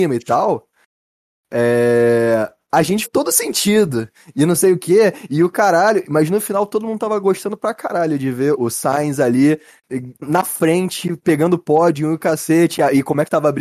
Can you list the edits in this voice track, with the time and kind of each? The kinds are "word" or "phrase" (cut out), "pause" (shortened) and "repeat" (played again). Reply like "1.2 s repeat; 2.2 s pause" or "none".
3.0 s word; 8.5 s word; 10.2 s word